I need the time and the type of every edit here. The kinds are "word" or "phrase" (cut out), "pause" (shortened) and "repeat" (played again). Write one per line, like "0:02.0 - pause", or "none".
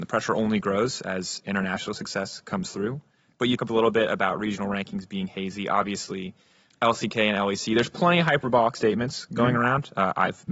0:03.6 - word
0:06.7 - word